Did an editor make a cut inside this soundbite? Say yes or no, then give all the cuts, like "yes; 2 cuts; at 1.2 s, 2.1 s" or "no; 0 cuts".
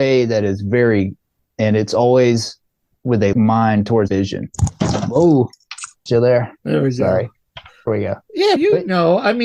yes; 6 cuts; at 1.5 s, 3.3 s, 4.1 s, 6.1 s, 7.9 s, 8.6 s